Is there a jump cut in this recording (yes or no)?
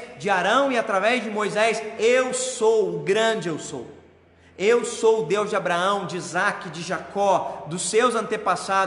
no